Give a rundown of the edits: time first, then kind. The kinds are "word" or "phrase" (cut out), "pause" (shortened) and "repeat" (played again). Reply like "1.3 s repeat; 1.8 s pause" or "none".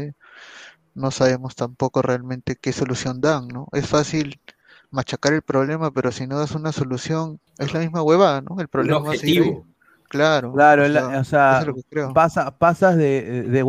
7.5 s pause